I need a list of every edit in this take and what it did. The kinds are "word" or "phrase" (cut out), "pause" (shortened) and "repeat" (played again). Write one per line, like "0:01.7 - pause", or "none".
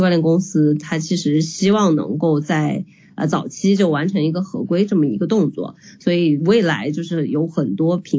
none